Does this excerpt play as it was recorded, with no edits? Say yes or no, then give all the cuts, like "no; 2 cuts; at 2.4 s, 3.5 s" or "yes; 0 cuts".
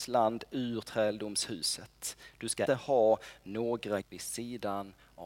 no; 2 cuts; at 2.7 s, 4.0 s